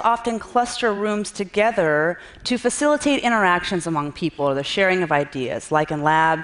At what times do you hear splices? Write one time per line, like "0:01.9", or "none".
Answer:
none